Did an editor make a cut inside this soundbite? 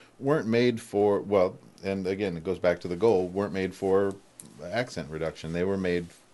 no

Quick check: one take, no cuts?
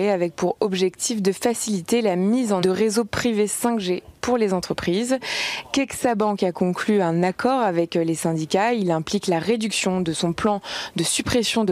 no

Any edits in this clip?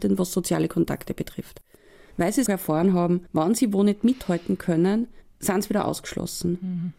yes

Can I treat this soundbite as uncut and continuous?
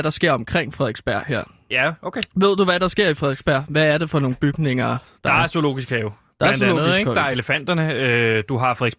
yes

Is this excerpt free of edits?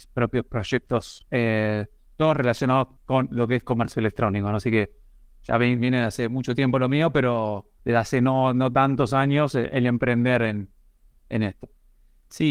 no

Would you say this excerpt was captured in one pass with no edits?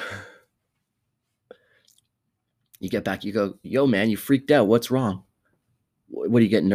yes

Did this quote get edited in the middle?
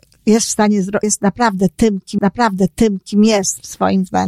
yes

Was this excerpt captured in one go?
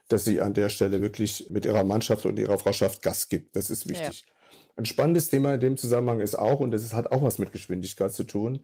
yes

